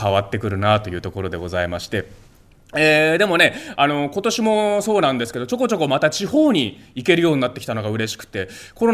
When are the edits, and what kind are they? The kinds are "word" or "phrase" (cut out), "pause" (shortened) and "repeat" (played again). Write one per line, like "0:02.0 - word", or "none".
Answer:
none